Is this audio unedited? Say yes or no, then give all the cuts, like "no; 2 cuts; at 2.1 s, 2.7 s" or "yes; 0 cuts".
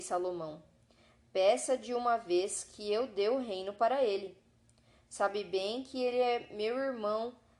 yes; 0 cuts